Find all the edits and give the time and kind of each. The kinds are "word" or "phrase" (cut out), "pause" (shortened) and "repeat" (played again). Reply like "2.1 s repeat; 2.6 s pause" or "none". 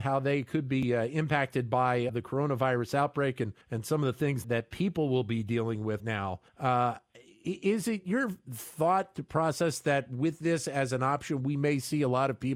2.1 s word; 3.6 s pause; 4.4 s word; 6.0 s word; 6.5 s pause